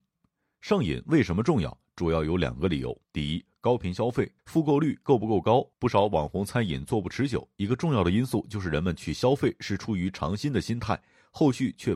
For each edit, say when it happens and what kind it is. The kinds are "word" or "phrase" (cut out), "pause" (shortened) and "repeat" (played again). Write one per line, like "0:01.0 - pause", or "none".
0:03.0 - pause
0:04.4 - pause
0:05.7 - pause